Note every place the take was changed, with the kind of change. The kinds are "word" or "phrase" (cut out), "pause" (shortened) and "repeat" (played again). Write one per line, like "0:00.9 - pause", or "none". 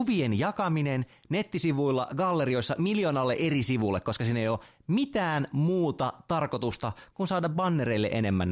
none